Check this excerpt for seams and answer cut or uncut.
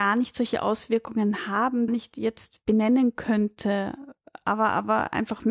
cut